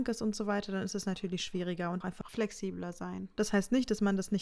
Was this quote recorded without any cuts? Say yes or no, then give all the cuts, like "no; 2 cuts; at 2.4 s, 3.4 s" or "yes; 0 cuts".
no; 1 cut; at 2.0 s